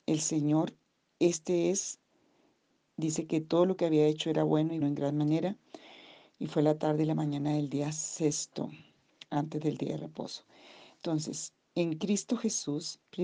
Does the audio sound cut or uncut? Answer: cut